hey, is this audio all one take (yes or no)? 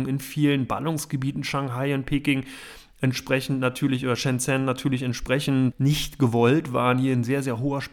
no